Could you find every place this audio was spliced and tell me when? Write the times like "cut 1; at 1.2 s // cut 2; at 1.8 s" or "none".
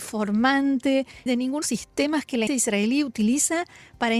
cut 1; at 1.3 s // cut 2; at 1.6 s // cut 3; at 2.5 s